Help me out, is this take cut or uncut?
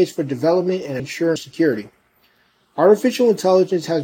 cut